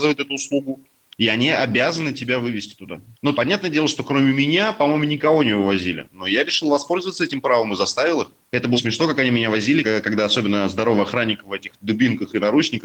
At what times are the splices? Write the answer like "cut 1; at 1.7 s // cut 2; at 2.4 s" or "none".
cut 1; at 3.3 s // cut 2; at 8.8 s // cut 3; at 9.8 s // cut 4; at 11.7 s